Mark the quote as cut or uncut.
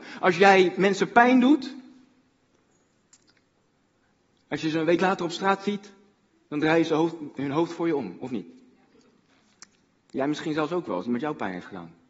uncut